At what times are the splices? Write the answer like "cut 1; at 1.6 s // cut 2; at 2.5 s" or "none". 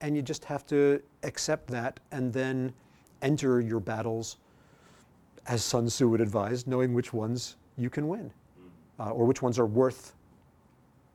none